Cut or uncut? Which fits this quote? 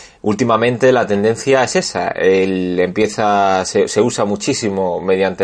uncut